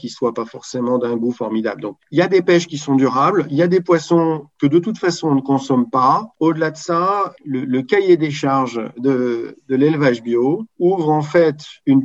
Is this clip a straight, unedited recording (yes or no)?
yes